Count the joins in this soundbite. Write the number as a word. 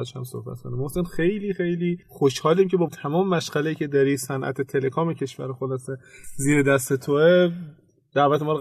two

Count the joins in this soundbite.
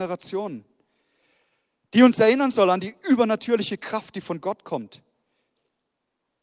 zero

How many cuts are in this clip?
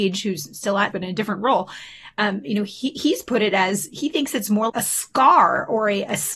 two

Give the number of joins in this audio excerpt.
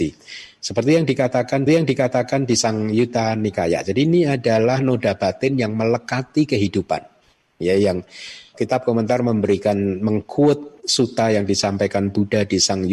two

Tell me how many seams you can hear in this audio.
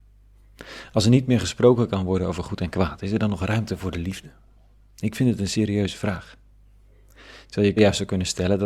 one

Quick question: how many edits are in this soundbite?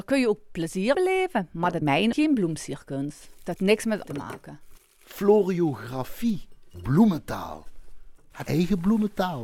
six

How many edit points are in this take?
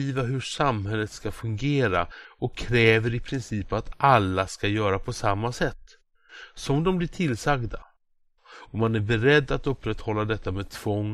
zero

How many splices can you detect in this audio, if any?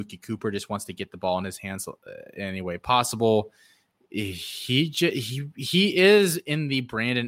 zero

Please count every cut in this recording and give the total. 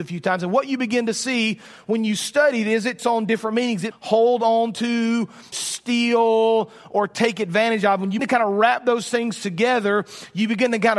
four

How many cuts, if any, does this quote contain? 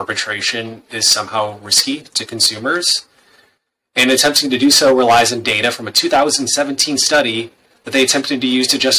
zero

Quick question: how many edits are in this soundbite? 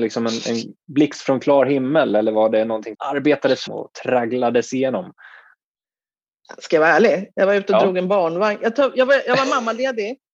two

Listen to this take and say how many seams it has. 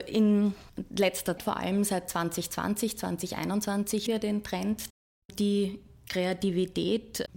two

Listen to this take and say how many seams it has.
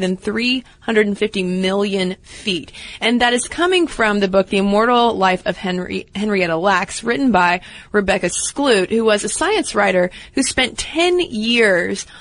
zero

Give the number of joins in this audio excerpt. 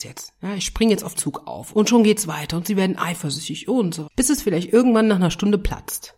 three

